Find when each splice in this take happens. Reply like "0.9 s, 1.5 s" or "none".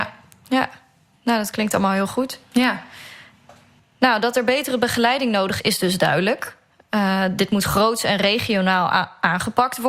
5.6 s